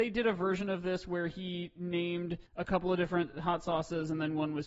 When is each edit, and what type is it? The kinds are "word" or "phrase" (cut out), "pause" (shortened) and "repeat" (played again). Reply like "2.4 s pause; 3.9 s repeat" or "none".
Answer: 2.5 s pause